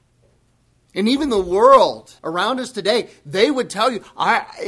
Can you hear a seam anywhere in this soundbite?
yes; 1 cut; at 2.2 s

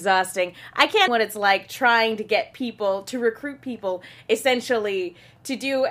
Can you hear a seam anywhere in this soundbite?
yes; 1 cut; at 1.1 s

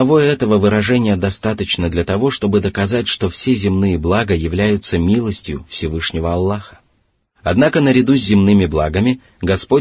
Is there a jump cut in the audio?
no; 0 cuts

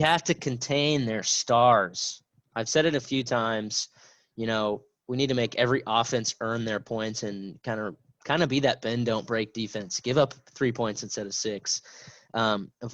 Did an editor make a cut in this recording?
no; 0 cuts

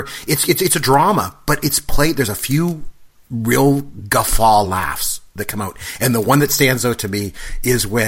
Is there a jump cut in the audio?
no; 0 cuts

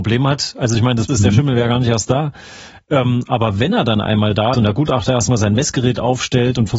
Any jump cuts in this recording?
yes; 2 cuts; at 1.1 s, 4.5 s

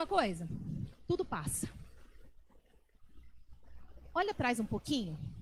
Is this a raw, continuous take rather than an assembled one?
no; 1 cut; at 4.3 s

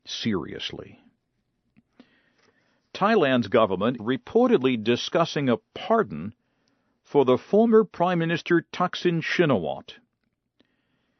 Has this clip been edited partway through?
yes; 1 cut; at 4.0 s

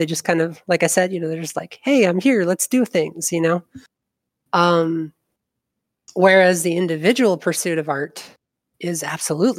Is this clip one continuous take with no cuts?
yes; 0 cuts

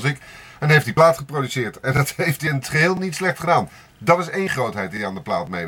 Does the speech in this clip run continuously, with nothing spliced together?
yes; 0 cuts

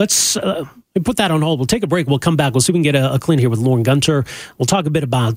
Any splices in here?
yes; 1 cut; at 3.4 s

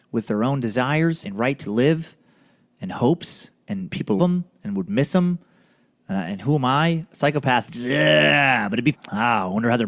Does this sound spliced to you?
yes; 4 cuts; at 1.2 s, 4.2 s, 7.7 s, 8.9 s

